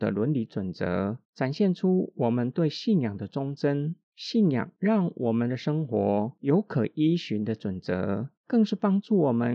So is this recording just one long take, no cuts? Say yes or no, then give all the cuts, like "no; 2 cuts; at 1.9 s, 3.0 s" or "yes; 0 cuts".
no; 3 cuts; at 1.2 s, 4.0 s, 8.4 s